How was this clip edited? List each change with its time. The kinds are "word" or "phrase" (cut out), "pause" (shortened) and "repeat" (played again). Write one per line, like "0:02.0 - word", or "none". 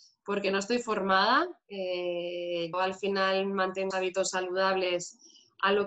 0:02.7 - word
0:03.9 - word